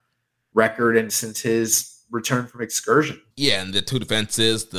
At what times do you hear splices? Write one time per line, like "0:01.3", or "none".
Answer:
0:01.1
0:03.3